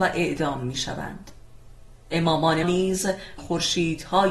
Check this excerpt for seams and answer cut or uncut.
cut